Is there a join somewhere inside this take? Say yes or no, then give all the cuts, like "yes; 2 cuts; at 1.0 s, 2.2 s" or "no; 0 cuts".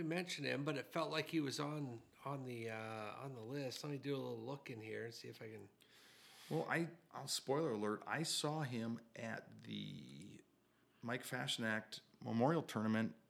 no; 0 cuts